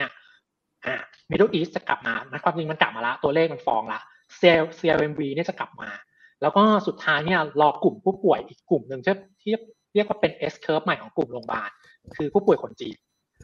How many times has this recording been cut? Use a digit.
0